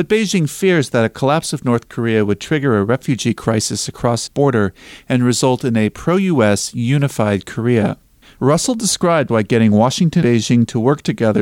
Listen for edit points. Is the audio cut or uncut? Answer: cut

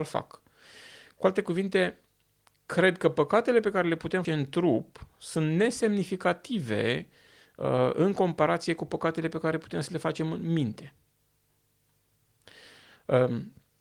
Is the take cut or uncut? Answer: cut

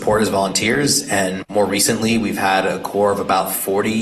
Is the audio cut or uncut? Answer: uncut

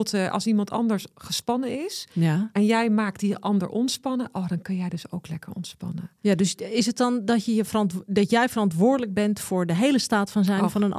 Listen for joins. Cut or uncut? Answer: uncut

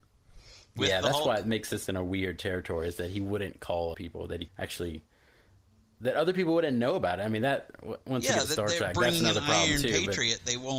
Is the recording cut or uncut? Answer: cut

